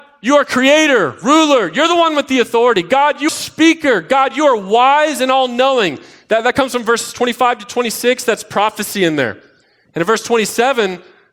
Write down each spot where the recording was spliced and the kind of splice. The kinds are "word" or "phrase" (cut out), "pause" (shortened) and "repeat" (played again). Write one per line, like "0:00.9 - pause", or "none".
0:03.3 - word